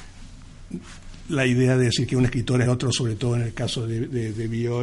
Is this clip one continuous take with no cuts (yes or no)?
no